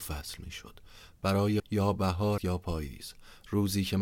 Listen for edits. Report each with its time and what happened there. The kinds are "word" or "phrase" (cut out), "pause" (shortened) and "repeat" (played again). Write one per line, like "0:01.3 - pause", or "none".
0:01.6 - word
0:02.4 - word